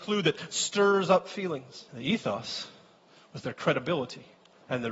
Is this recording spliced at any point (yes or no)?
yes